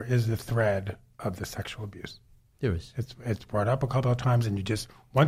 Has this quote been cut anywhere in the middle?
no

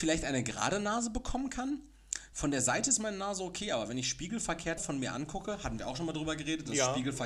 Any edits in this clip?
yes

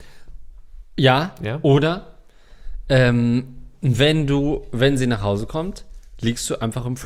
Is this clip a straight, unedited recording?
no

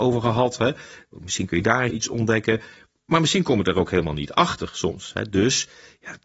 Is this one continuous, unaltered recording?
no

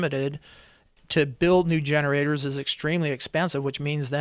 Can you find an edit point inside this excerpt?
no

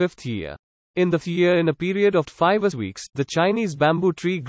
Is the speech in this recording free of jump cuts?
no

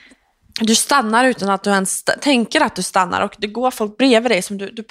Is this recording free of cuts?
yes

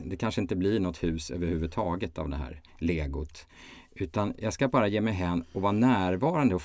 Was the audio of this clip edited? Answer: yes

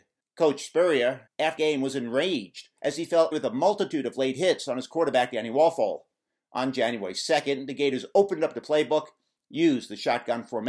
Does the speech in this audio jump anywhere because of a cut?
yes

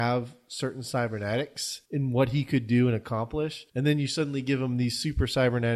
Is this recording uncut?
no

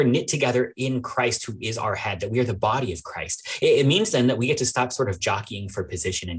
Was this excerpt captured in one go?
yes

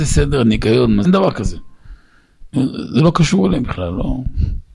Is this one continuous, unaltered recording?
no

